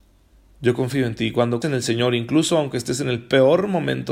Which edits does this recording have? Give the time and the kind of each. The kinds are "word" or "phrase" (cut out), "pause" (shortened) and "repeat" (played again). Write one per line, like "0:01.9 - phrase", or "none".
0:01.6 - word